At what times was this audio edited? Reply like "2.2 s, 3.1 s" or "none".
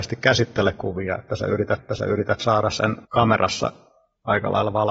1.8 s, 3.0 s